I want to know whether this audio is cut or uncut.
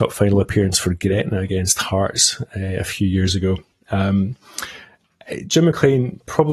uncut